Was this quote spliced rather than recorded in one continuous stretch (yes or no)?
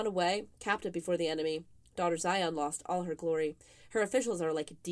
no